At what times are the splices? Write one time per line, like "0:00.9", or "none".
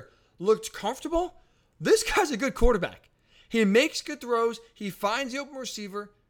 none